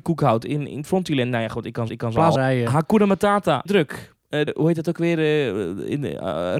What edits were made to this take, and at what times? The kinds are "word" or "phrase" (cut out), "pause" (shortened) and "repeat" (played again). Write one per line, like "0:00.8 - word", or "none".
0:01.9 - repeat
0:02.4 - phrase
0:03.7 - word
0:04.5 - word